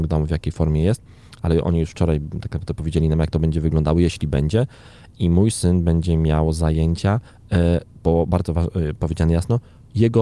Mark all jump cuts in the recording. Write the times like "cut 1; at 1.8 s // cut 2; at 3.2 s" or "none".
none